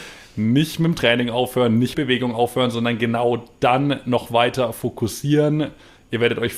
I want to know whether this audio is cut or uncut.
cut